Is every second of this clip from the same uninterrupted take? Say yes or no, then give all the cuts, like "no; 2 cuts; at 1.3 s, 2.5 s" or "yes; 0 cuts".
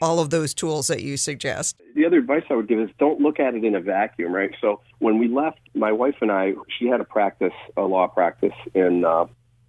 no; 2 cuts; at 4.9 s, 5.7 s